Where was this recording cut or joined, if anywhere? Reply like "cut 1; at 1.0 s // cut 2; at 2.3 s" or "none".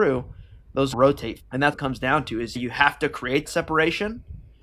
cut 1; at 0.9 s // cut 2; at 1.4 s // cut 3; at 1.7 s // cut 4; at 2.6 s // cut 5; at 3.5 s